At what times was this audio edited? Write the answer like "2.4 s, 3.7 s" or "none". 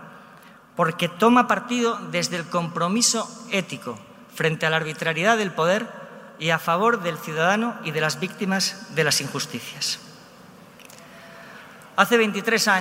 none